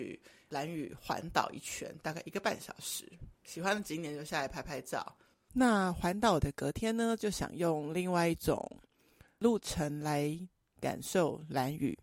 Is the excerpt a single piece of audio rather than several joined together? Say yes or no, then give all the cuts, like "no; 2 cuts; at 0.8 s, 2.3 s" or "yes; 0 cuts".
yes; 0 cuts